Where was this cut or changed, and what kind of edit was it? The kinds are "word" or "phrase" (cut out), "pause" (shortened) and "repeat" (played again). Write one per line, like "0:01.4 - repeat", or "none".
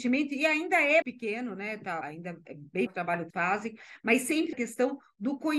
0:01.0 - word
0:02.0 - word
0:02.9 - word
0:03.3 - word
0:04.5 - word